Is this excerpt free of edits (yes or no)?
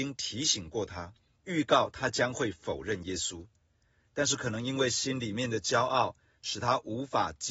no